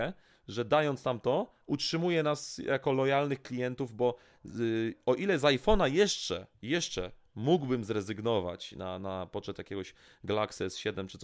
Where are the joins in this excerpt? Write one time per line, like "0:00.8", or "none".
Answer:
none